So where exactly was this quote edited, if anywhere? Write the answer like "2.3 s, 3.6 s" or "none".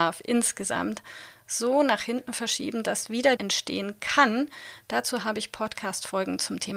3.4 s